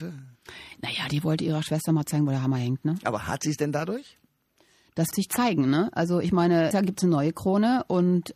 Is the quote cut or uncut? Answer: cut